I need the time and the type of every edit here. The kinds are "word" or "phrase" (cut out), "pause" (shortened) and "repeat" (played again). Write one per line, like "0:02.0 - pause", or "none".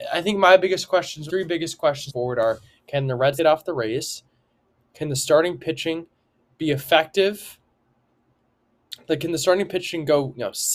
0:01.3 - word
0:02.1 - word
0:03.4 - word